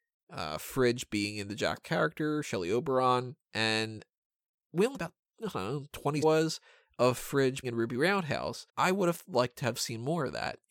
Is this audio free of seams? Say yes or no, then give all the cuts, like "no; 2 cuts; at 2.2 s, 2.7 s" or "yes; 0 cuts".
no; 6 cuts; at 1.8 s, 3.4 s, 4.9 s, 6.2 s, 7.6 s, 8.7 s